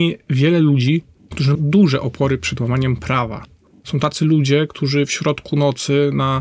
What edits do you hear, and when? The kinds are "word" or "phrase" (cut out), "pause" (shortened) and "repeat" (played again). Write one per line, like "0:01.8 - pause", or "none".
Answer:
0:01.5 - word